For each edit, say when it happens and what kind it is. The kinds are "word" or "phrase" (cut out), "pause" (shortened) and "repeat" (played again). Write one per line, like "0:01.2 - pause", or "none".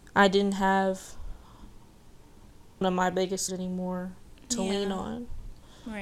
0:02.8 - word
0:03.5 - word